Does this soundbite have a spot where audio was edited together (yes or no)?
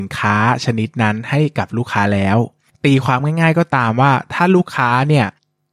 no